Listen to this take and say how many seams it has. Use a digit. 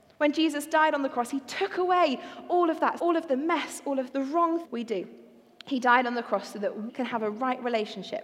4